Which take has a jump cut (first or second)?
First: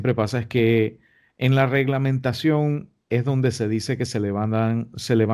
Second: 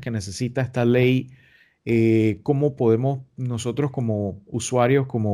first